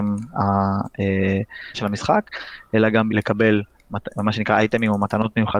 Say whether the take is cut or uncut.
cut